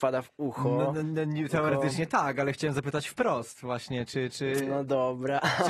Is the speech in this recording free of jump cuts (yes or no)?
yes